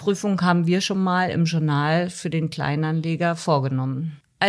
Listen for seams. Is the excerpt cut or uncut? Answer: uncut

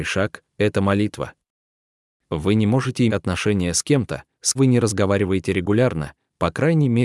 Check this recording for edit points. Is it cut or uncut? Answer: cut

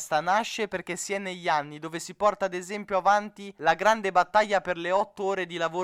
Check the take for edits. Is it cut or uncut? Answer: uncut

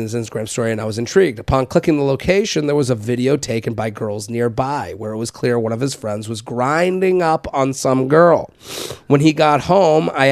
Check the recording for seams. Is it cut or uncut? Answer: uncut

